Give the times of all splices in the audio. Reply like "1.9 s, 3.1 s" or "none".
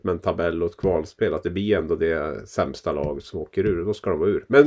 none